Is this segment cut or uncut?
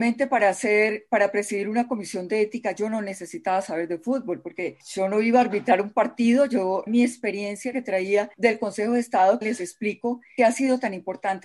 cut